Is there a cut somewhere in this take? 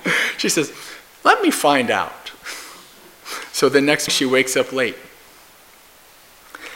yes; 1 cut; at 4.1 s

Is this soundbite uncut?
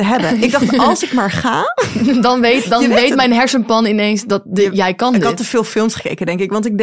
yes; 0 cuts

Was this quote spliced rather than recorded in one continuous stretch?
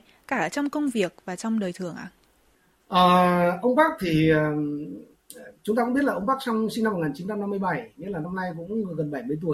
no; 0 cuts

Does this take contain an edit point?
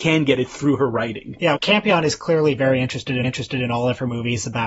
yes; 2 cuts; at 1.5 s, 3.2 s

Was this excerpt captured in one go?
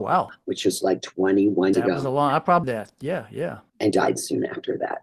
no; 3 cuts; at 1.7 s, 2.6 s, 3.9 s

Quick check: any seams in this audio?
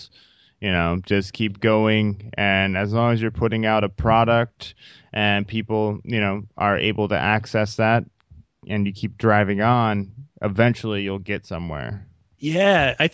no; 0 cuts

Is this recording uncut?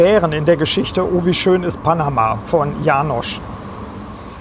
yes; 0 cuts

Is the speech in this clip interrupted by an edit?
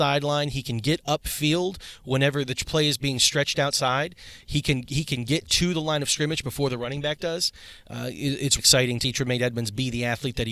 yes; 2 cuts; at 8.6 s, 9.0 s

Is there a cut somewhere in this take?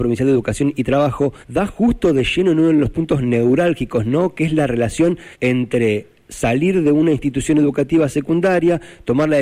yes; 2 cuts; at 1.4 s, 5.3 s

